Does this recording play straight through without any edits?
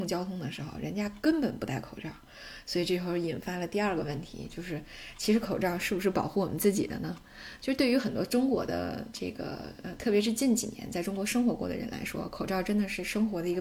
yes; 0 cuts

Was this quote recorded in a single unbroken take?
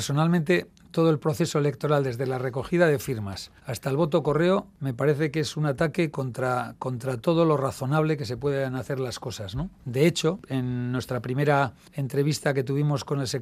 no; 2 cuts; at 3.6 s, 9.8 s

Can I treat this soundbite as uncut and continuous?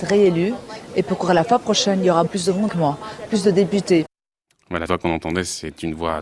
no; 4 cuts; at 2.3 s, 2.7 s, 3.3 s, 4.9 s

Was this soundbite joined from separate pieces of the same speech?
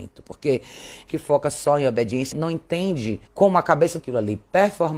yes; 4 cuts; at 1.1 s, 2.3 s, 3.3 s, 4.0 s

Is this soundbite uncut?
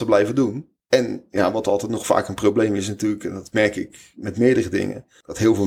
yes; 0 cuts

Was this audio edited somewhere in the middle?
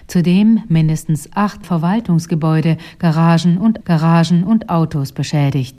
yes; 2 cuts; at 1.6 s, 3.8 s

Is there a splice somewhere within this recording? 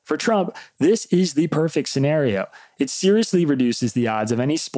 no; 0 cuts

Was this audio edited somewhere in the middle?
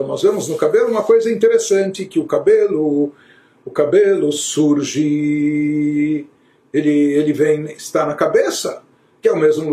no; 0 cuts

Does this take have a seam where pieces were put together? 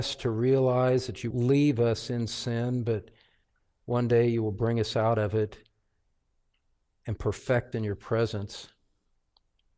yes; 2 cuts; at 1.3 s, 7.7 s

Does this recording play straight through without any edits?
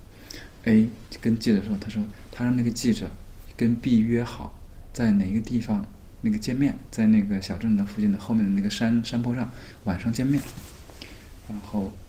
yes; 0 cuts

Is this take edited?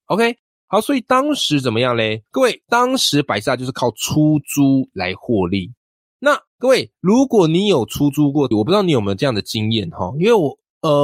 yes; 4 cuts; at 2.3 s, 4.9 s, 6.5 s, 8.5 s

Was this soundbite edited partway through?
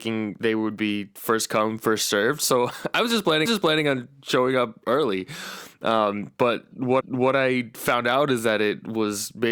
yes; 2 cuts; at 3.5 s, 7.0 s

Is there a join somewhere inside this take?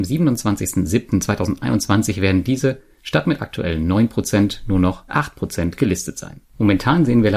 yes; 1 cut; at 5.1 s

